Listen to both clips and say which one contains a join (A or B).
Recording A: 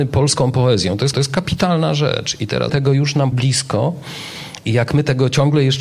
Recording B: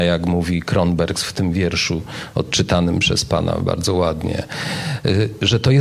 A